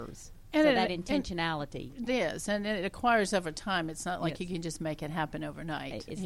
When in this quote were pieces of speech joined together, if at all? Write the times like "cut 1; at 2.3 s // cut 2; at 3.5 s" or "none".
cut 1; at 2.1 s

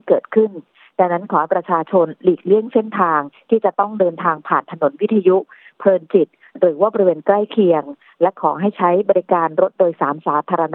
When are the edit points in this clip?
none

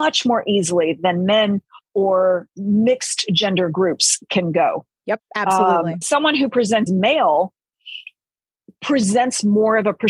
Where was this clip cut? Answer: cut 1; at 2.5 s // cut 2; at 6.0 s // cut 3; at 6.9 s

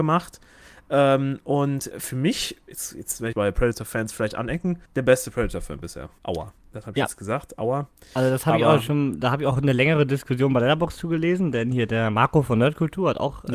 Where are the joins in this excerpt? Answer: cut 1; at 1.9 s // cut 2; at 3.3 s // cut 3; at 4.8 s // cut 4; at 6.2 s

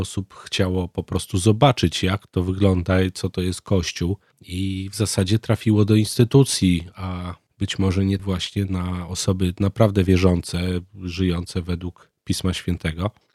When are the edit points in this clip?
cut 1; at 8.2 s

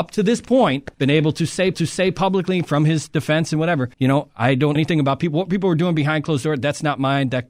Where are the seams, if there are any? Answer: cut 1; at 0.9 s // cut 2; at 1.7 s // cut 3; at 3.9 s // cut 4; at 4.8 s

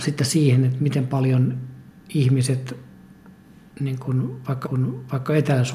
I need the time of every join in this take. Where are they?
cut 1; at 1.9 s // cut 2; at 4.6 s

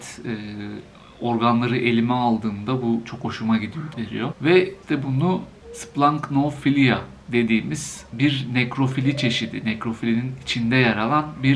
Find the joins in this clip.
cut 1; at 3.9 s // cut 2; at 4.8 s // cut 3; at 7.2 s

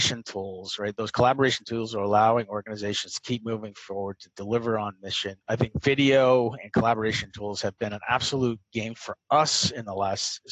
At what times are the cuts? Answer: cut 1; at 5.4 s // cut 2; at 8.9 s

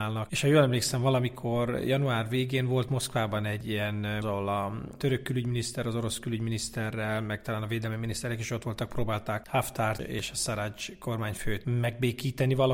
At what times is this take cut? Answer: cut 1; at 4.2 s

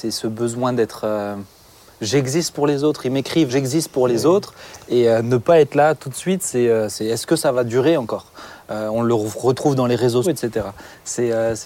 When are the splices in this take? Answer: cut 1; at 3.5 s // cut 2; at 10.2 s

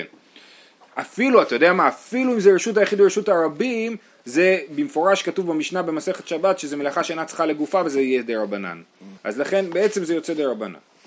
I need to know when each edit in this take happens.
cut 1; at 9.2 s

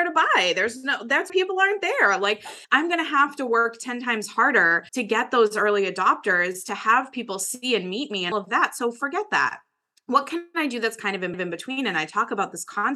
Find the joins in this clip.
cut 1; at 1.3 s // cut 2; at 2.6 s // cut 3; at 4.9 s // cut 4; at 8.3 s // cut 5; at 11.3 s

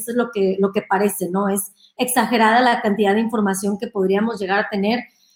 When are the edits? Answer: none

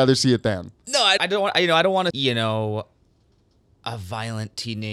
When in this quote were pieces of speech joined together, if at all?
cut 1; at 1.2 s // cut 2; at 2.1 s

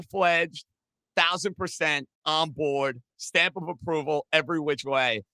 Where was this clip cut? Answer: none

